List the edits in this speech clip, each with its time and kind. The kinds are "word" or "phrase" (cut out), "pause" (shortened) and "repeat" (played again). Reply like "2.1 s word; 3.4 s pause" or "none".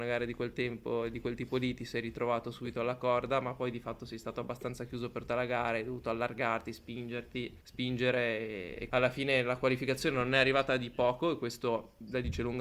5.3 s word; 7.6 s pause; 8.9 s word

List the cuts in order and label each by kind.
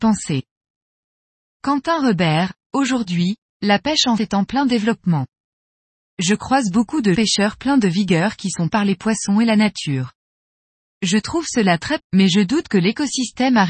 4.2 s word; 7.1 s word; 8.7 s word; 12.0 s word

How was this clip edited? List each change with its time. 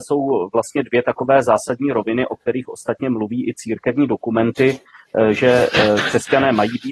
none

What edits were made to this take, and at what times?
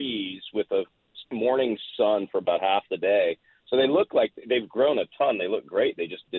none

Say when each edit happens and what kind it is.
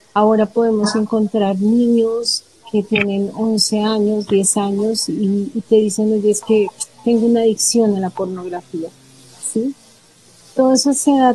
6.9 s pause

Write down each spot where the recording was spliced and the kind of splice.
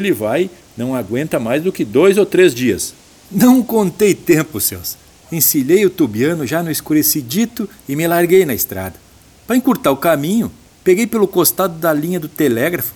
none

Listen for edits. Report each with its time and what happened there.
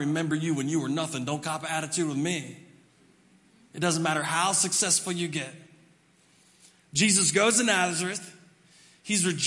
none

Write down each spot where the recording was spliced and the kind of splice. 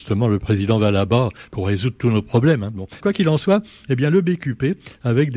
3.0 s word

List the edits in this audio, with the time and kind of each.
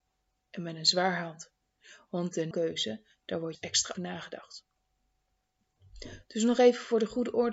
2.5 s word; 3.5 s word; 3.9 s word

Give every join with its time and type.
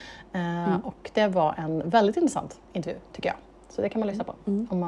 2.6 s pause

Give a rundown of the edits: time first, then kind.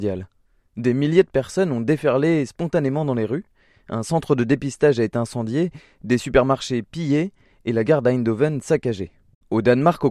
none

